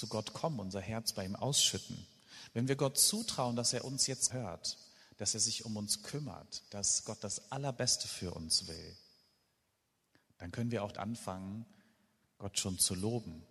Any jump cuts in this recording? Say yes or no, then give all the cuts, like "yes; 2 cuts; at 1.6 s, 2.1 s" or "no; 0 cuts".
yes; 2 cuts; at 4.3 s, 10.9 s